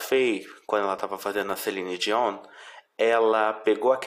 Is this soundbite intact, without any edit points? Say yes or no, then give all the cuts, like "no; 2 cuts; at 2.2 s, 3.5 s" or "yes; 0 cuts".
yes; 0 cuts